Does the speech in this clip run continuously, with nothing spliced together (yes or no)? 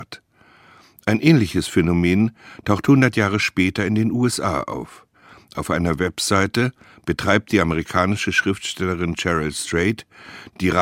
yes